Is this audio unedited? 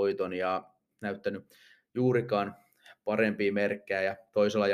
no; 1 cut; at 0.9 s

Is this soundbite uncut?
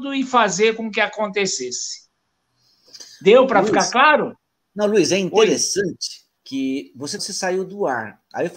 no; 2 cuts; at 6.4 s, 7.2 s

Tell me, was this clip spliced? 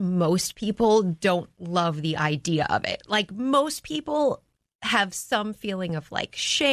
no; 0 cuts

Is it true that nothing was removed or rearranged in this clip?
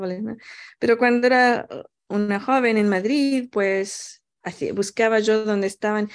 yes; 0 cuts

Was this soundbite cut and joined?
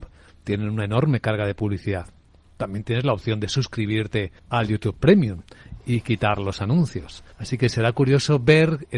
yes; 2 cuts; at 4.4 s, 7.3 s

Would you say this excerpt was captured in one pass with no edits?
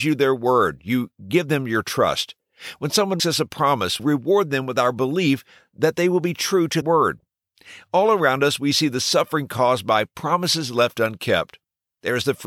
no; 3 cuts; at 3.2 s, 4.0 s, 6.8 s

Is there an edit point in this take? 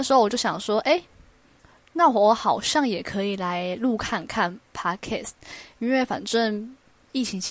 no; 0 cuts

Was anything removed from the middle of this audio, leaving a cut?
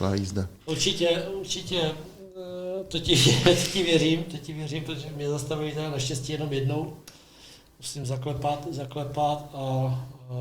no; 0 cuts

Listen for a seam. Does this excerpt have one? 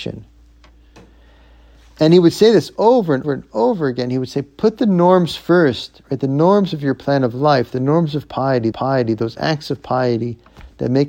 yes; 2 cuts; at 3.2 s, 8.7 s

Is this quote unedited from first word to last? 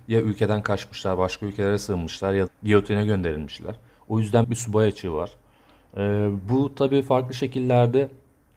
no; 2 cuts; at 2.5 s, 4.4 s

